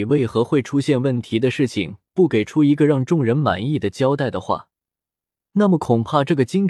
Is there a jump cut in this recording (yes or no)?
no